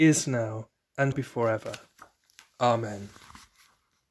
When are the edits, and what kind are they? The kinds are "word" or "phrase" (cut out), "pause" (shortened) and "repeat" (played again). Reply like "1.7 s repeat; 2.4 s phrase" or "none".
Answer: 1.1 s word